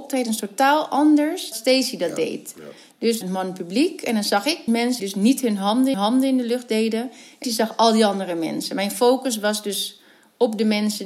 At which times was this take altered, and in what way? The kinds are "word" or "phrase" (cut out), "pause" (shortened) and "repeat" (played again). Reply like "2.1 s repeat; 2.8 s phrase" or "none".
1.5 s phrase; 3.2 s phrase; 4.7 s phrase; 5.0 s word; 5.9 s repeat; 7.4 s word